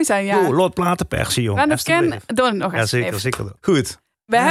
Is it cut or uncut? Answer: cut